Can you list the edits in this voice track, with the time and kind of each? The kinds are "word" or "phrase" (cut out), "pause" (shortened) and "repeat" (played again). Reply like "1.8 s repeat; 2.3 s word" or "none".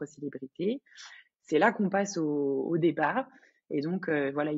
none